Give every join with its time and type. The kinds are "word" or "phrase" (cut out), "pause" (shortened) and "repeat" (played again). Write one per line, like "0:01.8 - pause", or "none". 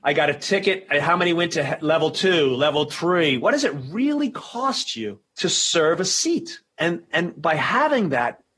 none